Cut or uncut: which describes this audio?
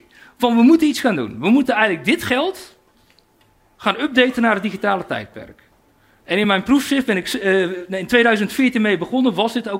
uncut